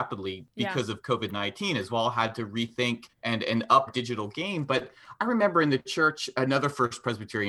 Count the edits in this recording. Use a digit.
3